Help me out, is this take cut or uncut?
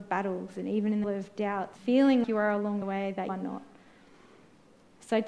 cut